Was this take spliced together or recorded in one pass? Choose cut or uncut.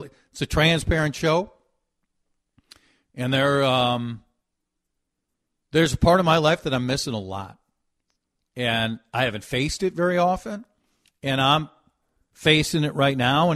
uncut